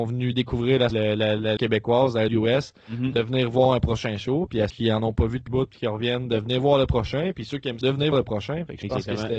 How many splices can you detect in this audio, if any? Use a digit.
7